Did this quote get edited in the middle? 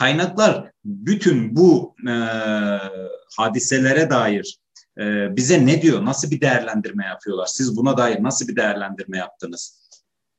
no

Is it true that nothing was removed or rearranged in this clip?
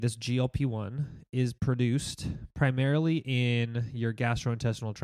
yes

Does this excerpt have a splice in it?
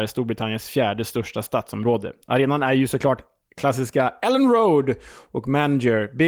no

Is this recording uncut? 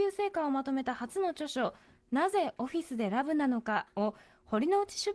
yes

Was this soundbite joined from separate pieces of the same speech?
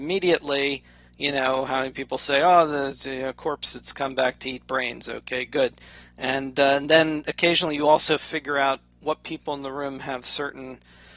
no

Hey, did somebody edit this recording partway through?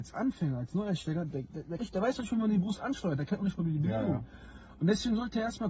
yes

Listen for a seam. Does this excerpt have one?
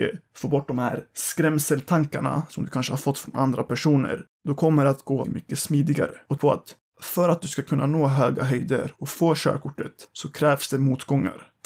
yes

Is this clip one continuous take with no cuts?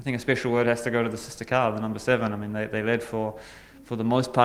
yes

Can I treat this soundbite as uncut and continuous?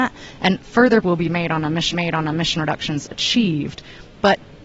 no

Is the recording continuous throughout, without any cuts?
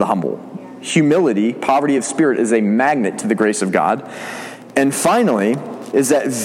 yes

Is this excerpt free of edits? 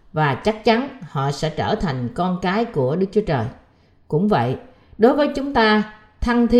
yes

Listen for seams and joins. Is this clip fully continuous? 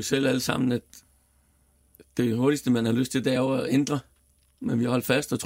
yes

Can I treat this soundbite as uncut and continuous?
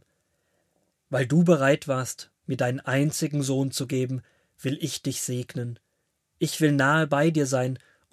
yes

